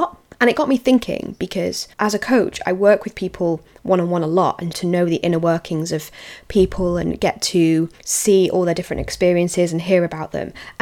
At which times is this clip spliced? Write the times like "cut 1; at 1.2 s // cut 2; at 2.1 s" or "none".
cut 1; at 1.9 s // cut 2; at 4.7 s // cut 3; at 7.9 s